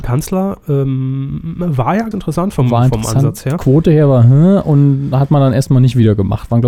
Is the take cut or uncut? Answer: cut